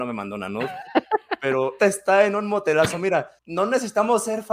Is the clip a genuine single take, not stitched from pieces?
no; 2 cuts; at 1.8 s, 3.4 s

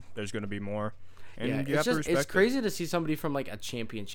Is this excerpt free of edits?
yes; 0 cuts

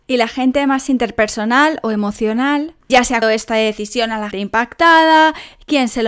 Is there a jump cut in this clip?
yes; 3 cuts; at 2.9 s, 3.2 s, 4.3 s

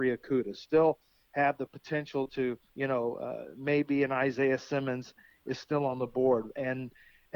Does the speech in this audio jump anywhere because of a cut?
yes; 1 cut; at 2.7 s

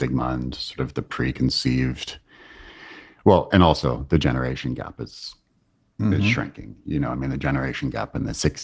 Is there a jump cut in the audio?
no; 0 cuts

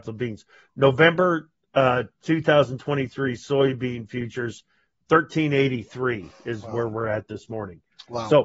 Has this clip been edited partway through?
no; 0 cuts

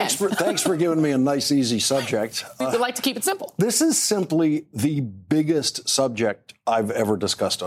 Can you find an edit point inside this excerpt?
yes; 1 cut; at 2.6 s

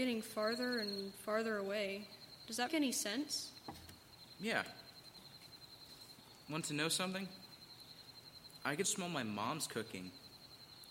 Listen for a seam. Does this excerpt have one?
yes; 2 cuts; at 2.7 s, 8.8 s

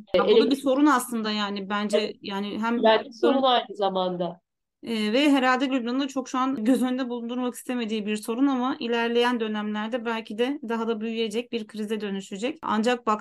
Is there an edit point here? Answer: no; 0 cuts

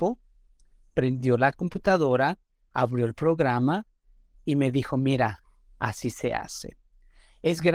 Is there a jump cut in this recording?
no; 0 cuts

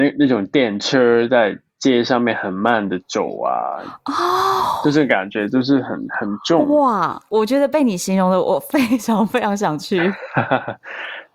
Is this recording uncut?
yes; 0 cuts

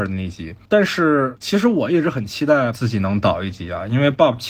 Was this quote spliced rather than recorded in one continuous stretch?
yes; 1 cut; at 2.7 s

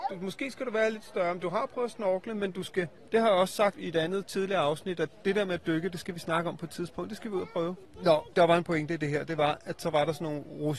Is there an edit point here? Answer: no; 0 cuts

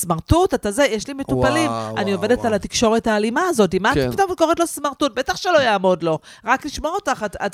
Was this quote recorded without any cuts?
yes; 0 cuts

